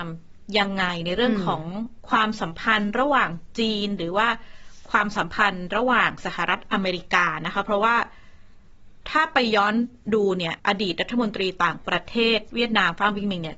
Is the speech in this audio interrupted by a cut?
yes; 1 cut; at 10.6 s

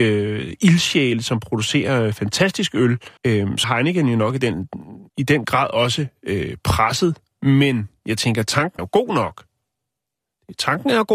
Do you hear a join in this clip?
yes; 4 cuts; at 3.2 s, 3.6 s, 5.1 s, 8.8 s

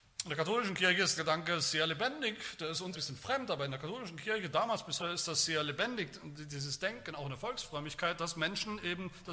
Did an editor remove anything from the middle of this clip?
yes; 3 cuts; at 1.2 s, 2.9 s, 5.0 s

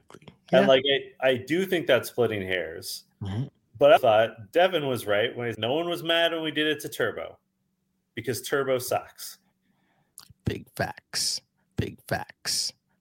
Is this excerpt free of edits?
no; 3 cuts; at 4.0 s, 5.5 s, 11.7 s

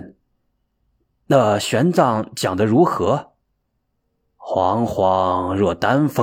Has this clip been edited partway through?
yes; 1 cut; at 3.4 s

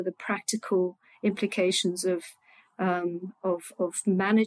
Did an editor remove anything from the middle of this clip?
no; 0 cuts

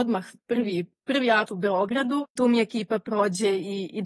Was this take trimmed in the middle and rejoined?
yes; 2 cuts; at 1.5 s, 2.4 s

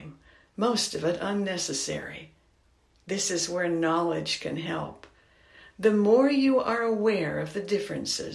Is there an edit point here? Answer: no; 0 cuts

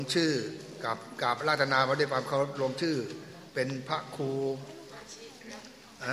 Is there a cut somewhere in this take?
yes; 1 cut; at 3.5 s

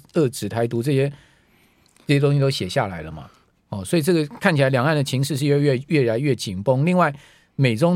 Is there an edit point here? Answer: no; 0 cuts

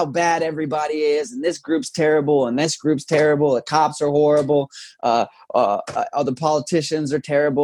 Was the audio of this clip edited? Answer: no; 0 cuts

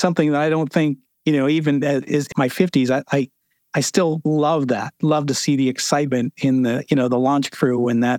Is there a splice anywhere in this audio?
yes; 1 cut; at 2.3 s

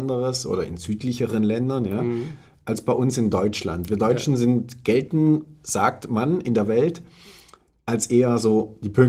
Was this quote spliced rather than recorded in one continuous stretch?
no; 0 cuts

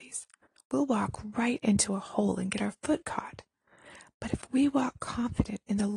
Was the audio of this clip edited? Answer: no; 0 cuts

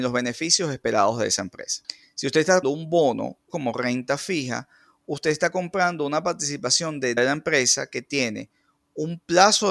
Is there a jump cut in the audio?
yes; 3 cuts; at 2.6 s, 3.5 s, 7.2 s

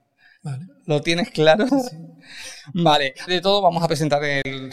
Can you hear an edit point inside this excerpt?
yes; 2 cuts; at 1.7 s, 3.3 s

